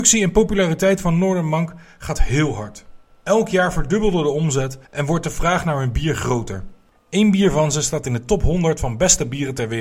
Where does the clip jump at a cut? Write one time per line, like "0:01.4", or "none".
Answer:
0:03.1
0:04.8
0:06.9